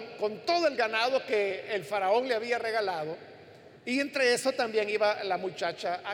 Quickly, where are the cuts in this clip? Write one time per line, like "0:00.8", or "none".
0:03.8

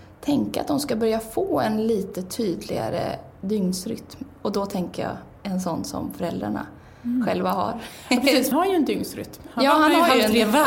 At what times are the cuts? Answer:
0:05.4
0:08.5

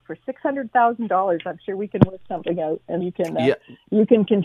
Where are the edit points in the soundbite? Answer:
0:03.0

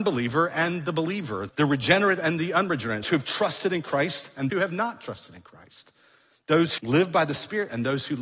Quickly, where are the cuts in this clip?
0:01.5
0:03.0
0:04.5
0:06.8

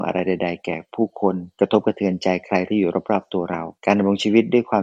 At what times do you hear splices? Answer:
0:01.5
0:03.8

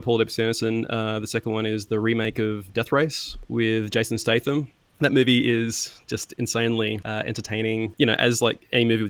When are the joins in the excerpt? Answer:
none

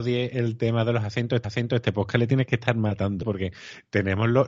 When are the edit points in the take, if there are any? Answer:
0:01.4
0:03.2

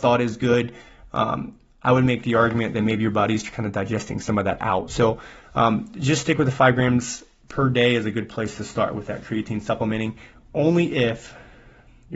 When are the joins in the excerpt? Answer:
none

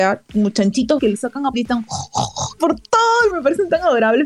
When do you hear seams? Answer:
0:01.0
0:01.5
0:02.6
0:03.3

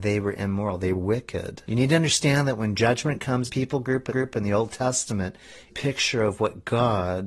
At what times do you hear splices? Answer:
0:00.9
0:01.6
0:03.5
0:04.1
0:05.7

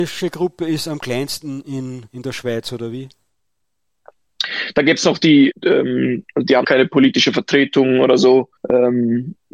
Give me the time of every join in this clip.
0:02.1
0:05.5
0:06.6
0:08.6

